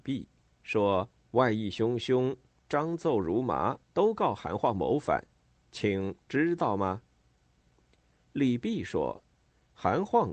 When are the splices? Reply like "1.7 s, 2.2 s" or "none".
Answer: 1.2 s, 3.8 s, 9.3 s